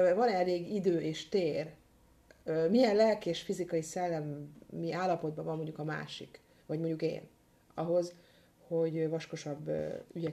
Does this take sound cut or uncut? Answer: uncut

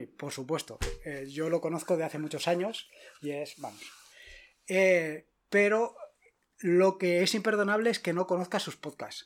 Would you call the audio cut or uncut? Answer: uncut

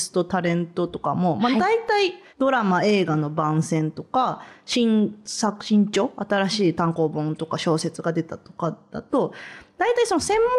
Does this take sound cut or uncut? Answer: cut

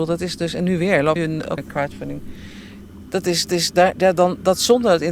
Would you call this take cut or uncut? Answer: cut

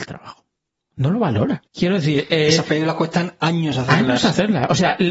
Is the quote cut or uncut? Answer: cut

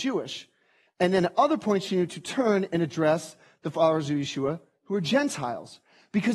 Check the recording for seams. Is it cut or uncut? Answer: uncut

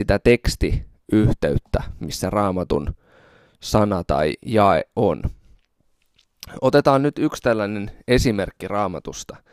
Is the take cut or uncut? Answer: uncut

